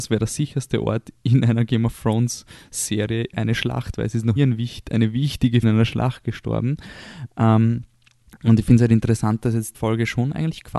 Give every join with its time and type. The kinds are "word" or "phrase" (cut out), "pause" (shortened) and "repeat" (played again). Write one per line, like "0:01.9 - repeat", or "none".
0:01.2 - pause
0:04.4 - word
0:05.6 - word
0:09.7 - word

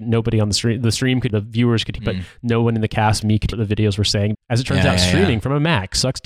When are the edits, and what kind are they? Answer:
0:01.3 - word
0:02.0 - word
0:03.2 - word
0:03.5 - word
0:04.3 - word

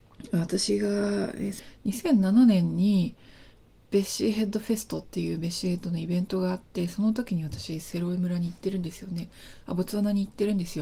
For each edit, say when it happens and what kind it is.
none

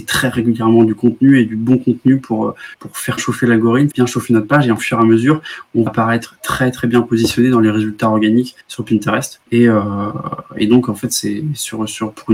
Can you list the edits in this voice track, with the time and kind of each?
0:02.7 - pause
0:03.2 - word
0:03.9 - word
0:04.8 - phrase
0:05.9 - word
0:08.6 - pause
0:09.4 - pause

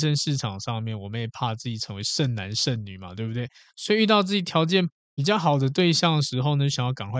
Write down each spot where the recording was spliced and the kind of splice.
none

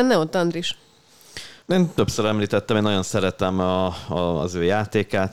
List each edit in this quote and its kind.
0:01.6 - pause

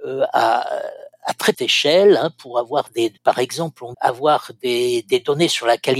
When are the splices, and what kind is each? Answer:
0:01.5 - word
0:03.2 - pause
0:03.9 - word

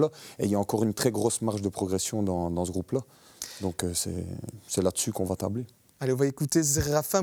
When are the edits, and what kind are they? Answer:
none

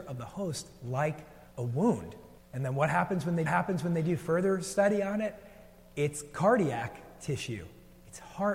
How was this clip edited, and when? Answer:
0:01.5 - pause
0:02.4 - pause
0:03.5 - repeat

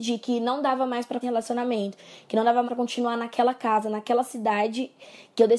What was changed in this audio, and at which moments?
0:01.2 - phrase
0:02.7 - word

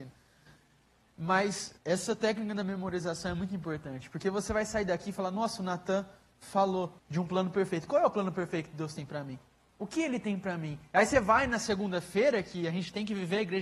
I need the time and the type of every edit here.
0:01.8 - pause
0:07.0 - pause
0:09.5 - pause

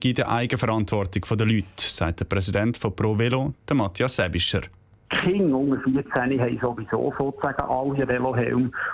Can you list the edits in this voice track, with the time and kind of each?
none

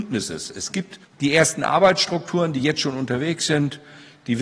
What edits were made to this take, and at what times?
0:01.0 - pause

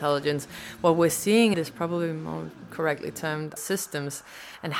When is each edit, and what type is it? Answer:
0:01.5 - word
0:03.6 - word

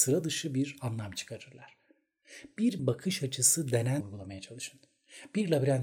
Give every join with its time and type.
0:02.8 - word
0:04.0 - word

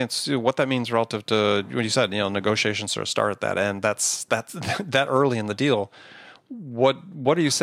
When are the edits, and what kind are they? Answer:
none

